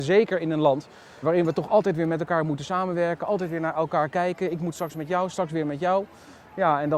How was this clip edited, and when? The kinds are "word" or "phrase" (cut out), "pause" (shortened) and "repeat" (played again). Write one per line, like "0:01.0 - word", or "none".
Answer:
0:01.2 - word